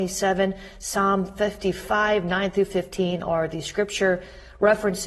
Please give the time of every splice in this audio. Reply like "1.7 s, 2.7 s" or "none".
none